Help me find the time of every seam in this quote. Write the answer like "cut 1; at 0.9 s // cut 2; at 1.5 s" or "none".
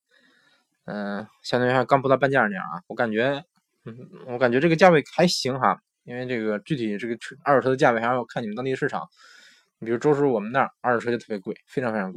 none